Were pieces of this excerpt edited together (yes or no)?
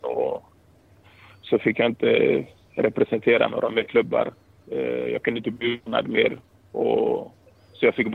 no